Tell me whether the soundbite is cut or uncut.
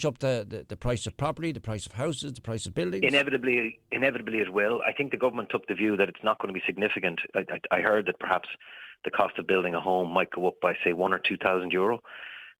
uncut